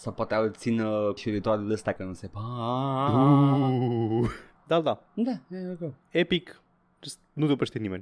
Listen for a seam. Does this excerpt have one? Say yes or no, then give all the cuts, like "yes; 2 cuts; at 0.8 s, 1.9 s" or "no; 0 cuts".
yes; 3 cuts; at 1.2 s, 2.0 s, 5.1 s